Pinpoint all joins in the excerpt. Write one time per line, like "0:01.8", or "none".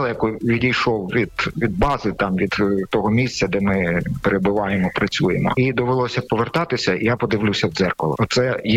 none